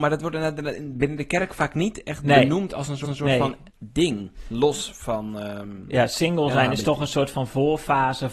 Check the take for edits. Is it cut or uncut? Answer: cut